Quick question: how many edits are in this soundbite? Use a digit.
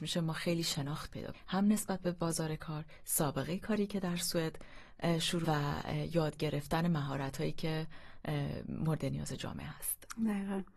2